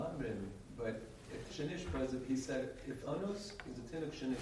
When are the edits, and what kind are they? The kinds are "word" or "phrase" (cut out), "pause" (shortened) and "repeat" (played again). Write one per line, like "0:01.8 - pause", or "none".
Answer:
0:01.5 - word
0:03.0 - word